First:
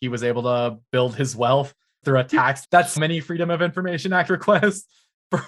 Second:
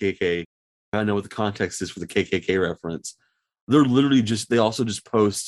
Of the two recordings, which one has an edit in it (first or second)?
first